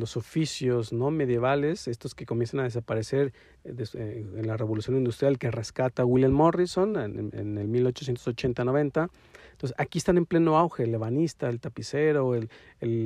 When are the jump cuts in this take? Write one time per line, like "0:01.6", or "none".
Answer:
none